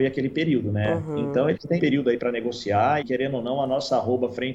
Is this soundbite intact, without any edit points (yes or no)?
no